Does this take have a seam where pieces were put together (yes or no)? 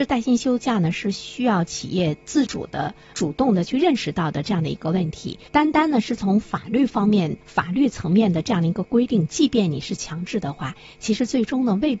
yes